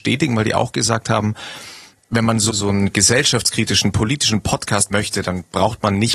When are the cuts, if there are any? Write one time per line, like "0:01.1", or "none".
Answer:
0:02.5
0:04.9

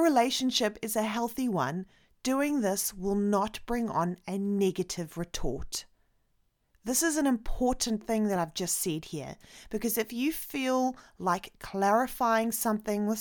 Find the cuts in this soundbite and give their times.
none

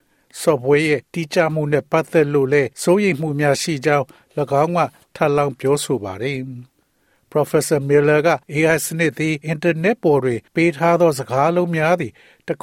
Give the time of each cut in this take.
0:01.0
0:02.7
0:06.7
0:08.4
0:09.4
0:10.5

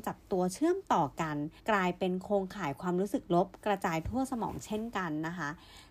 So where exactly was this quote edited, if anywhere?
0:01.6

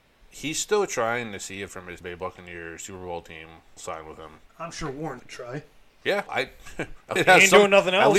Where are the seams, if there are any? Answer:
0:01.7
0:02.0
0:03.8
0:05.2
0:06.3
0:07.2

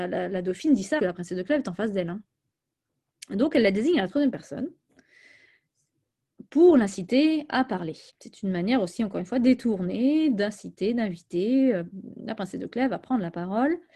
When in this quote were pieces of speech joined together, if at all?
0:01.0
0:08.1

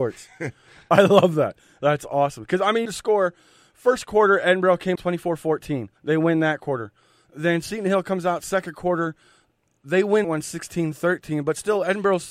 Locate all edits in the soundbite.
0:02.9
0:05.0
0:06.0
0:10.2

